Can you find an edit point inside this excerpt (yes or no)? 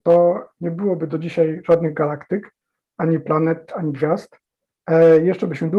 no